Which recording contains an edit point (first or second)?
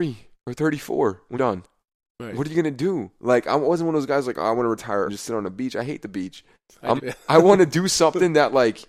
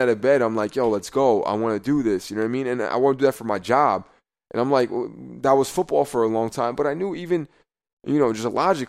first